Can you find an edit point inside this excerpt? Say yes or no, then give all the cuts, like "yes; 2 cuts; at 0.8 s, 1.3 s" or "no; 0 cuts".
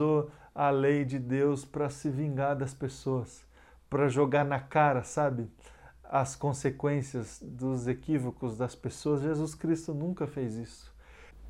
no; 0 cuts